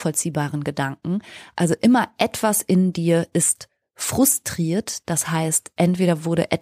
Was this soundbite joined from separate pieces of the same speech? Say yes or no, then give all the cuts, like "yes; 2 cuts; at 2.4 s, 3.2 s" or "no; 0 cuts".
no; 0 cuts